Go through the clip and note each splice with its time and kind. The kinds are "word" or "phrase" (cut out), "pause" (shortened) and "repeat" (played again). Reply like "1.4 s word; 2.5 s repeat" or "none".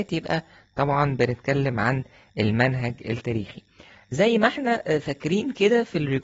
none